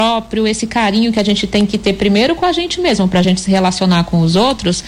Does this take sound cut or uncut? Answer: uncut